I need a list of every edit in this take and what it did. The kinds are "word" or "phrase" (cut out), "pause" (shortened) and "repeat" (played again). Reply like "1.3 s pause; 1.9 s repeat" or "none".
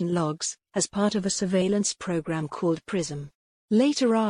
none